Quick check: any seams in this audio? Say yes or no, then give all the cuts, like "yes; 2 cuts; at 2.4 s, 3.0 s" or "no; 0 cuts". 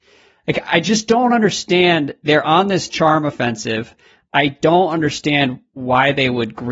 no; 0 cuts